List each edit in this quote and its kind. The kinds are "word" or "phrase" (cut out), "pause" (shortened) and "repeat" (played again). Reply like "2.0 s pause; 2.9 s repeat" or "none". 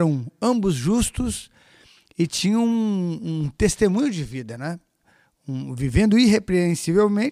none